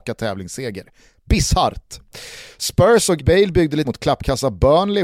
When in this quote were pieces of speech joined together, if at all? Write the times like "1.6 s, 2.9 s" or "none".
3.2 s, 3.8 s